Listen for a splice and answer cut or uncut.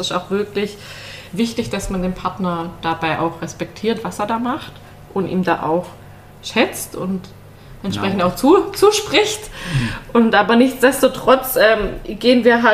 uncut